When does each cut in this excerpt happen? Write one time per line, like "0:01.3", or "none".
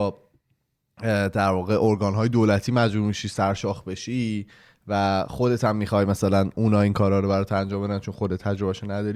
none